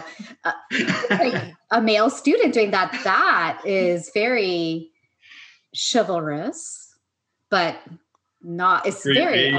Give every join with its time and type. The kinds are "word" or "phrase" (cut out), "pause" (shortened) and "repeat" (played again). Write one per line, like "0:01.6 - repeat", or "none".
none